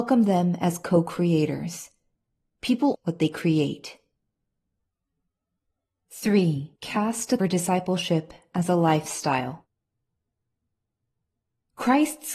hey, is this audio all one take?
no; 3 cuts; at 2.9 s, 6.8 s, 7.4 s

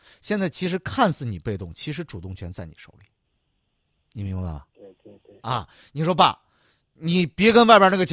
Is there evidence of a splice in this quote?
no; 0 cuts

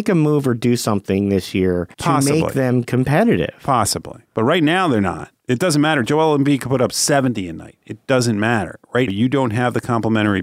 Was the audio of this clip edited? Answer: yes; 4 cuts; at 1.9 s, 4.2 s, 5.4 s, 9.1 s

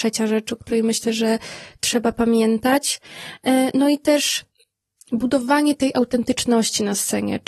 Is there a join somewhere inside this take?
no; 0 cuts

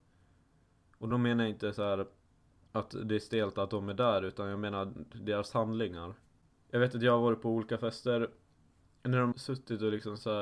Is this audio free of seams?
yes; 0 cuts

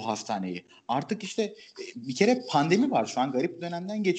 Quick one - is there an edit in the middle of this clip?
no; 0 cuts

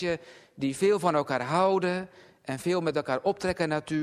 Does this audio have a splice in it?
no; 0 cuts

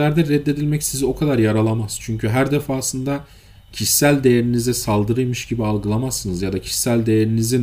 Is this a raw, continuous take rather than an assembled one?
yes; 0 cuts

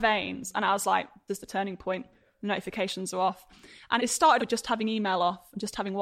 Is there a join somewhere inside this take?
yes; 3 cuts; at 1.3 s, 4.0 s, 4.4 s

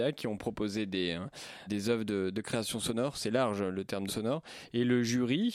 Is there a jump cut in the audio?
yes; 2 cuts; at 1.7 s, 4.1 s

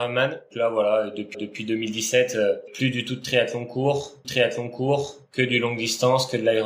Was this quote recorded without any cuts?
no; 2 cuts; at 1.3 s, 4.2 s

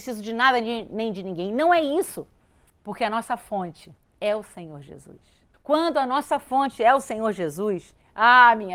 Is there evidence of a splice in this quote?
yes; 3 cuts; at 2.7 s, 4.0 s, 5.5 s

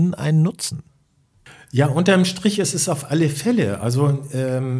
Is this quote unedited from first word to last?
yes; 0 cuts

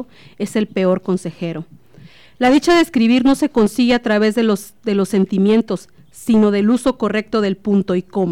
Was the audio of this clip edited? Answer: no; 0 cuts

